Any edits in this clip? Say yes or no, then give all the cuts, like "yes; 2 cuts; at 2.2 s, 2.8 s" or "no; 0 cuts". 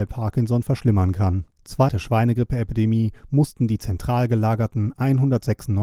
yes; 1 cut; at 1.9 s